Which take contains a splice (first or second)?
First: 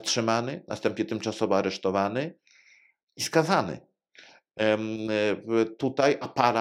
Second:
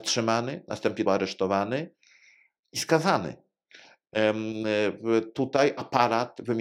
second